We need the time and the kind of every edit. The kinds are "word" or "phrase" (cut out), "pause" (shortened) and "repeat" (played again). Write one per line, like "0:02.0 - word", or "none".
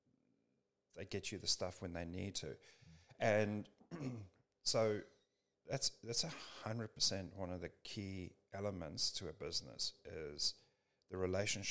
none